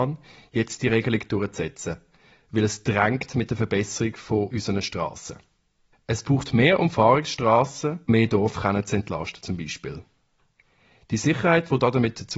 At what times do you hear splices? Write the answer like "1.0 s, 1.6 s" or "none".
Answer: 8.1 s